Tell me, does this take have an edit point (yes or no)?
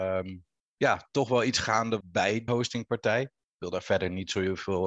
yes